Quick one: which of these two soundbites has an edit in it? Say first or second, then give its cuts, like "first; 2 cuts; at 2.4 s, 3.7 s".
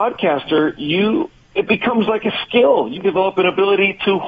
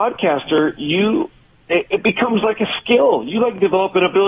first; 2 cuts; at 1.5 s, 3.0 s